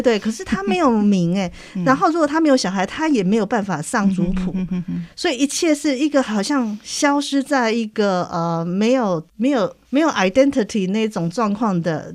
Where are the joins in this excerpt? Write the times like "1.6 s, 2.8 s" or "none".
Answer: 9.3 s, 9.8 s